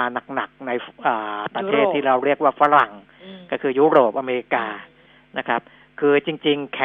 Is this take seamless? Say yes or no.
yes